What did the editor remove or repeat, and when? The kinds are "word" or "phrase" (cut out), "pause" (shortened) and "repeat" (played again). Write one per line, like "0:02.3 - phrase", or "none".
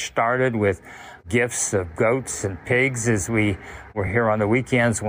none